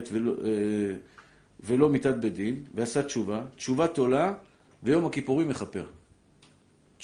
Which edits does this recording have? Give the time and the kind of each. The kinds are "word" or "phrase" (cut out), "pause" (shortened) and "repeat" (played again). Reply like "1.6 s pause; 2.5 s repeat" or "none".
none